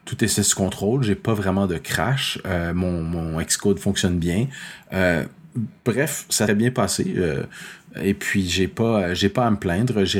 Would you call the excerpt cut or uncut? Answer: cut